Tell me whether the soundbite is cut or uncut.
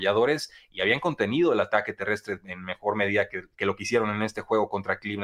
uncut